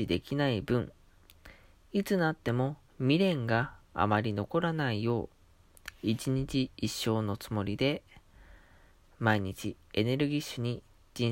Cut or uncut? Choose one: cut